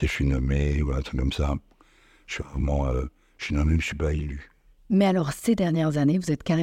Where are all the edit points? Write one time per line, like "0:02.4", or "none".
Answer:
none